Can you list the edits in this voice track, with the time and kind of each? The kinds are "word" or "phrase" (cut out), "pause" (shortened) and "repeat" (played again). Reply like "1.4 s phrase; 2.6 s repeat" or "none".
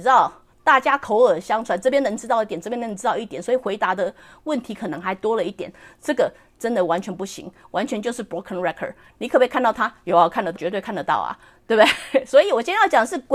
10.6 s word